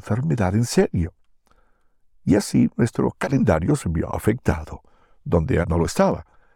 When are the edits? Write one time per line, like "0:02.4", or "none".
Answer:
0:05.6